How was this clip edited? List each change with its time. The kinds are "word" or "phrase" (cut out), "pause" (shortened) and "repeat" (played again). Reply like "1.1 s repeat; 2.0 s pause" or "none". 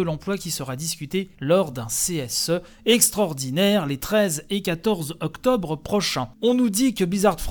none